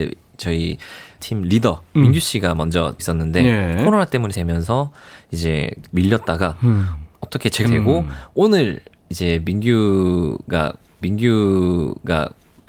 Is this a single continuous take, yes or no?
no